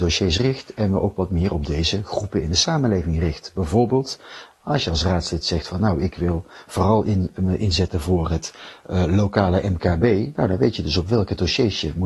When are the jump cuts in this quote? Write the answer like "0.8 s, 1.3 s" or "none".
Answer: none